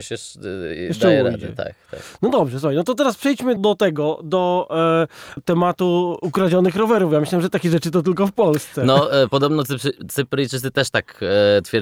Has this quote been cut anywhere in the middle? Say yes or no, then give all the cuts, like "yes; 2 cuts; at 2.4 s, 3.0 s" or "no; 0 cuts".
yes; 2 cuts; at 3.6 s, 5.4 s